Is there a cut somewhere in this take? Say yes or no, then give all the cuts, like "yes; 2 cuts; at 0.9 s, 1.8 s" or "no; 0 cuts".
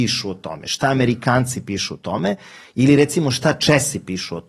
no; 0 cuts